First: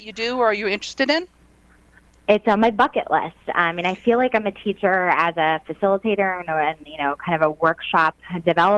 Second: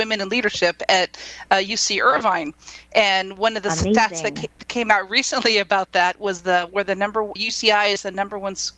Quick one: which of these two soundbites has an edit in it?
second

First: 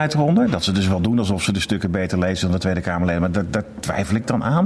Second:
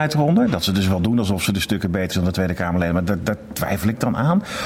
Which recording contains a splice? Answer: second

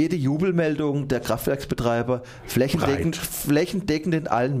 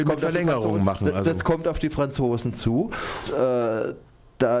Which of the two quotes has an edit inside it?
second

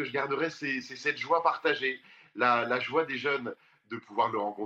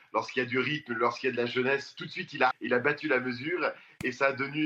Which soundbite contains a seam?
second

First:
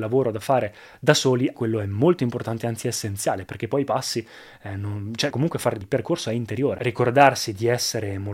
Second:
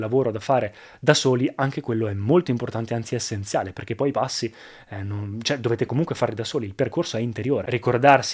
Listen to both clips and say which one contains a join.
first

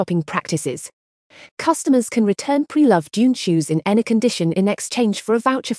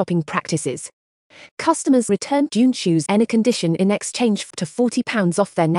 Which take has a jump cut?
second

